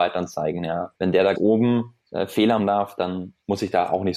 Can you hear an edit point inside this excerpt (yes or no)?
yes